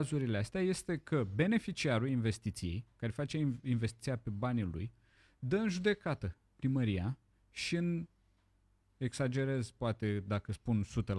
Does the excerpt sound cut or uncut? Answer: uncut